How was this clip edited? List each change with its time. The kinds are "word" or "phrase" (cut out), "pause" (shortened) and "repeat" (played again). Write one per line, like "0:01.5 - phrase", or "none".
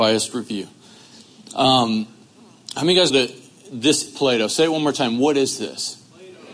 0:03.1 - word
0:04.1 - word